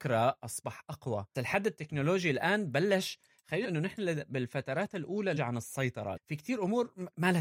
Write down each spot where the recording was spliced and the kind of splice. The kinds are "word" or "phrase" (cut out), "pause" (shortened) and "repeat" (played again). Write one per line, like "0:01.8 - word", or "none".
0:01.3 - word
0:03.6 - word
0:05.4 - word
0:06.2 - word